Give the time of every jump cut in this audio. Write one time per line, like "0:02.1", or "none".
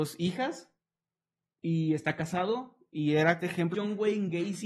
0:03.4
0:03.7